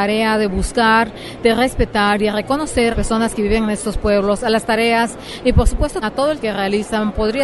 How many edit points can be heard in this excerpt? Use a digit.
3